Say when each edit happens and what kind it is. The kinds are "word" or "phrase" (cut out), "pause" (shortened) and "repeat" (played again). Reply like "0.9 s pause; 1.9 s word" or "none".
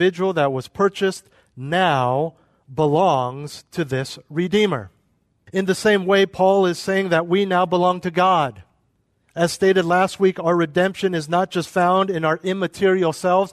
none